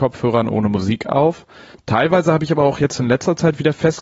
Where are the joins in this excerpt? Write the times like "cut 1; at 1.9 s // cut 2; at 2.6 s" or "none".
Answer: cut 1; at 1.7 s